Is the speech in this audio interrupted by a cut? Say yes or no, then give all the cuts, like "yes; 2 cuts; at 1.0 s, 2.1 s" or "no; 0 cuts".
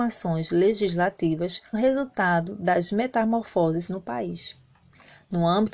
yes; 2 cuts; at 1.7 s, 3.9 s